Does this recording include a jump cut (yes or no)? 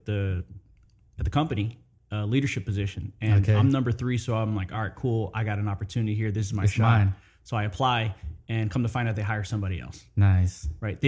no